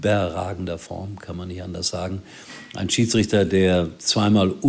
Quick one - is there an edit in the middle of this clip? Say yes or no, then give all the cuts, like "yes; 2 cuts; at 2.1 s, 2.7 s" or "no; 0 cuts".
no; 0 cuts